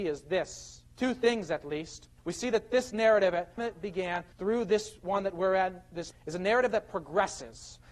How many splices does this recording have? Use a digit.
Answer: 5